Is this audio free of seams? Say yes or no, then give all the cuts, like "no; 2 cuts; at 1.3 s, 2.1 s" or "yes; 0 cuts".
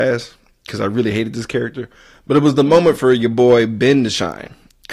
yes; 0 cuts